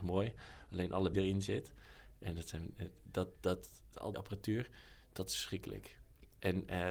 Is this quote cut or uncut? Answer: cut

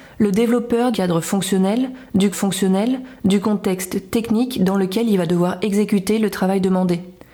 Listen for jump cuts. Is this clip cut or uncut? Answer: cut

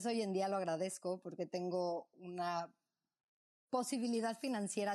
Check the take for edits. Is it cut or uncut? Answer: uncut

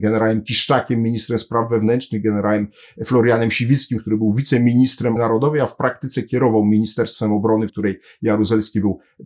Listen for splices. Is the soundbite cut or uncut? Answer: cut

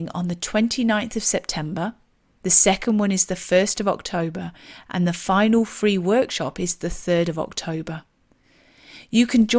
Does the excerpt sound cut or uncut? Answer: uncut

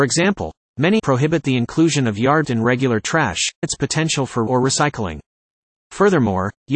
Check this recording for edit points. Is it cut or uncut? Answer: cut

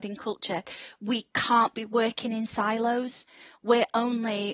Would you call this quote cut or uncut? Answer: uncut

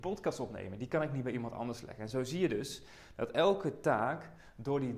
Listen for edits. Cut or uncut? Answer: uncut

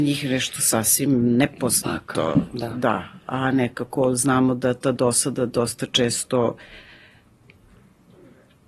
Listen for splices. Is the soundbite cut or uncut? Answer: uncut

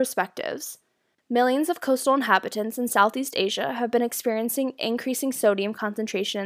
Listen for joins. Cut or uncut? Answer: uncut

